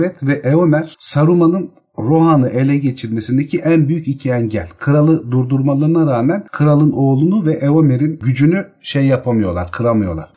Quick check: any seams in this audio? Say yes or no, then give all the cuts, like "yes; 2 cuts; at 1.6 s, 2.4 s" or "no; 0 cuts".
no; 0 cuts